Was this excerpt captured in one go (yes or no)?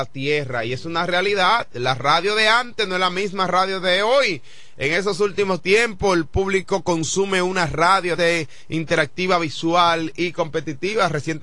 no